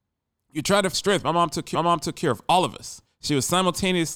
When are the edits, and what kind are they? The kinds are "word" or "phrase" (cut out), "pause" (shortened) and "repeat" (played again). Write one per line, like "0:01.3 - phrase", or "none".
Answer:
0:00.9 - word
0:01.7 - repeat
0:03.0 - pause